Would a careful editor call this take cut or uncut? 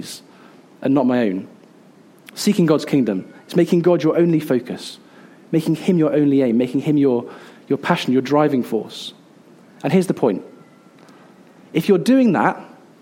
uncut